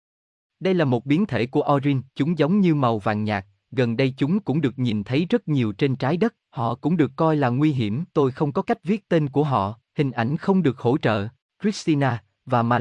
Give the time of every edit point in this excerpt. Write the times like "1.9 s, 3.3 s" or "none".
2.1 s, 6.4 s, 8.1 s, 9.9 s, 11.4 s